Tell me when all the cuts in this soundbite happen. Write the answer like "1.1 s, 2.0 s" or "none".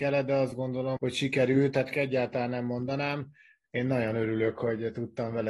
1.0 s, 1.9 s